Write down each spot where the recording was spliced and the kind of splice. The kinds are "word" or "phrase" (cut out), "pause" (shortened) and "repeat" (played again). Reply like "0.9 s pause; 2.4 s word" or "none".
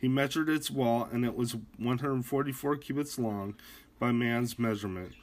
none